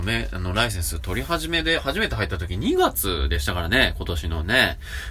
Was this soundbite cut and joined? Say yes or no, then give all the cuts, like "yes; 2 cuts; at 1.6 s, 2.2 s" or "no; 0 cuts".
no; 0 cuts